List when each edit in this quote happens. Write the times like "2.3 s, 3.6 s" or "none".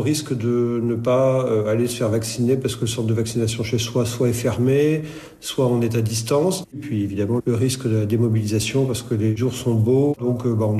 none